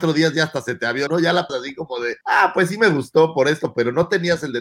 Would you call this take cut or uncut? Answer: cut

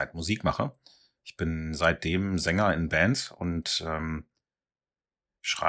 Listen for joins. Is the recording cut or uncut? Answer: uncut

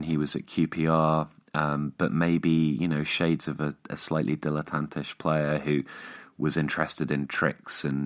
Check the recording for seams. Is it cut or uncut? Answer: cut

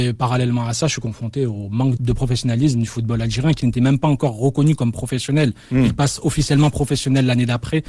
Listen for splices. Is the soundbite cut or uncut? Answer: cut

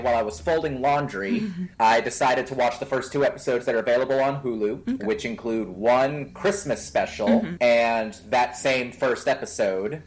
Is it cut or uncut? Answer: cut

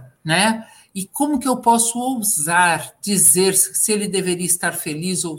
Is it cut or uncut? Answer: uncut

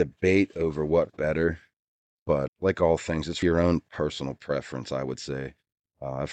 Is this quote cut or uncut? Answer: cut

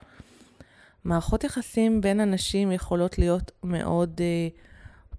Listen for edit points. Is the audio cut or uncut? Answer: uncut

